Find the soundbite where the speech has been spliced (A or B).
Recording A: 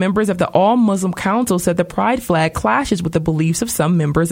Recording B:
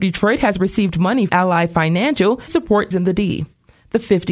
B